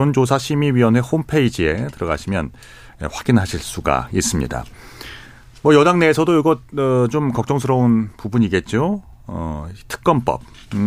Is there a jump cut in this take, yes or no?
no